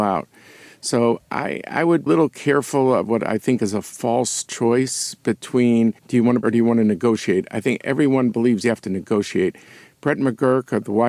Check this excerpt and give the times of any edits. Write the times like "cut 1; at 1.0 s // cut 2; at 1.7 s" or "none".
cut 1; at 2.1 s // cut 2; at 6.0 s // cut 3; at 6.4 s

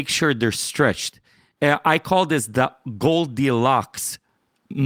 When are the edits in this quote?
none

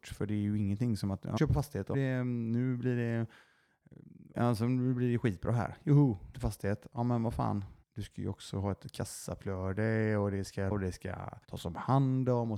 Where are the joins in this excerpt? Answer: cut 1; at 1.4 s // cut 2; at 1.9 s // cut 3; at 4.3 s // cut 4; at 6.3 s // cut 5; at 7.8 s // cut 6; at 10.7 s // cut 7; at 11.4 s

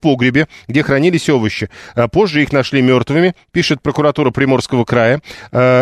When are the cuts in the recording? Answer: none

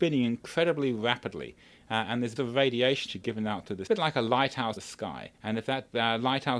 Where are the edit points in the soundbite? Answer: cut 1; at 2.4 s // cut 2; at 3.1 s // cut 3; at 3.9 s // cut 4; at 4.8 s // cut 5; at 5.4 s

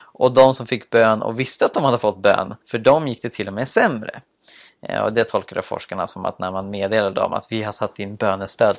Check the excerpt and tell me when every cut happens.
cut 1; at 2.6 s

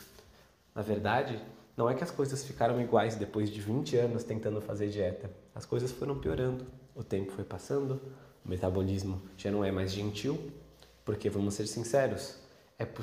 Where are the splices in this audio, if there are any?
none

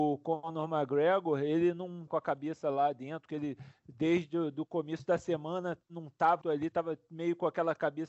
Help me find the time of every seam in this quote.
cut 1; at 2.1 s // cut 2; at 6.4 s

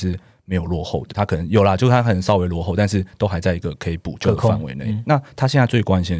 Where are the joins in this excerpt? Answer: cut 1; at 1.1 s

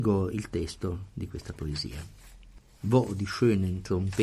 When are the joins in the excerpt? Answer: none

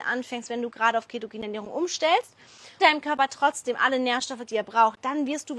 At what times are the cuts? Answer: cut 1; at 2.8 s // cut 2; at 4.4 s

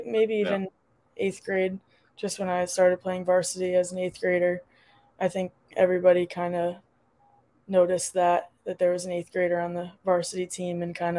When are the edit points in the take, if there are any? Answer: none

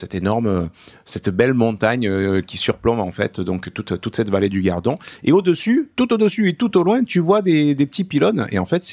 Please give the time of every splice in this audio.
none

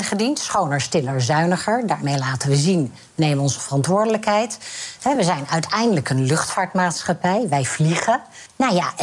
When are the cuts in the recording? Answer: none

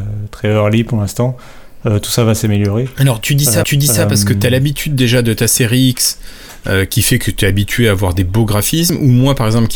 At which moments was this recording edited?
cut 1; at 3.6 s

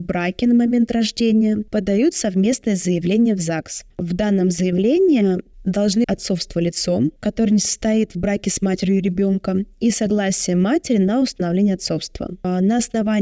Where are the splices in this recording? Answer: cut 1; at 6.0 s

